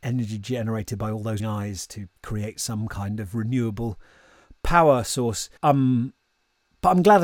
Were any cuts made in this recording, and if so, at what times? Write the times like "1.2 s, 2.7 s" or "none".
1.4 s, 2.2 s, 5.6 s